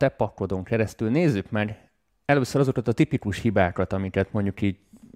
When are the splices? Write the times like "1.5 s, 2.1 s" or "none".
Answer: none